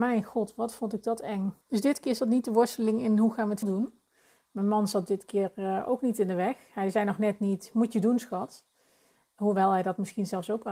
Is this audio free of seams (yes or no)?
no